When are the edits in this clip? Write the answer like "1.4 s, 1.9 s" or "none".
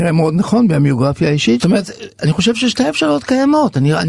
1.6 s